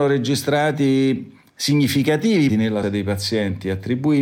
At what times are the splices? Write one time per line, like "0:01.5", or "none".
0:02.5
0:02.8

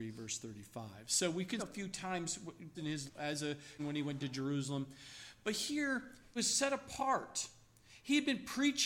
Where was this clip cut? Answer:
0:01.6
0:02.7
0:03.1
0:03.8
0:04.2
0:06.4

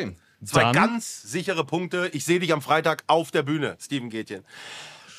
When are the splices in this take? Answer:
none

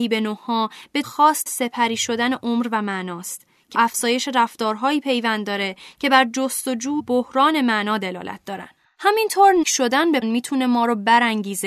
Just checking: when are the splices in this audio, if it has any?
0:01.0
0:01.5
0:03.7
0:07.0
0:09.6
0:10.2

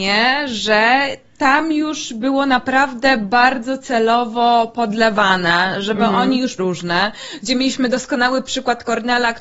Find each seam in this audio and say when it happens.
0:06.6

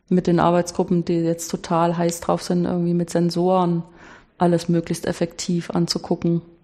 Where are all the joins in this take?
none

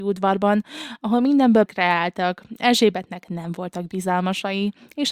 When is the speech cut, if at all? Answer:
0:01.7

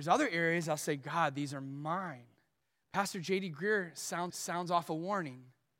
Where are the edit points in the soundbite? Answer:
0:02.6
0:04.3

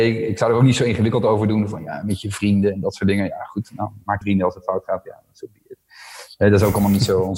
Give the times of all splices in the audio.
0:04.2

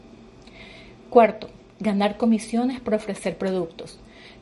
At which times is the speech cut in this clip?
none

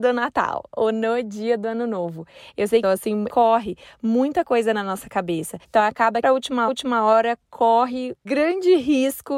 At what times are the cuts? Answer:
0:02.8
0:03.3
0:05.6
0:06.2
0:06.7
0:08.3

